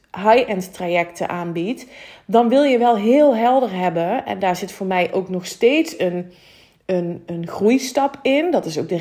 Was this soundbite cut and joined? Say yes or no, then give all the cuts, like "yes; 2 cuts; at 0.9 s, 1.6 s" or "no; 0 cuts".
no; 0 cuts